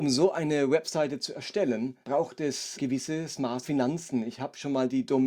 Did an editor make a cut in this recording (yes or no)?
yes